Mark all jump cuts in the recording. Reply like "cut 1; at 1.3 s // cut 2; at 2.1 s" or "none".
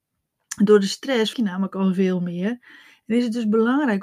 cut 1; at 1.3 s